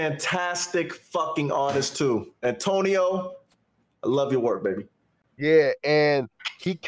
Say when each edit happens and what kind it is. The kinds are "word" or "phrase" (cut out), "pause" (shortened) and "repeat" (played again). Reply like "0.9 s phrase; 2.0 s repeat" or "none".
none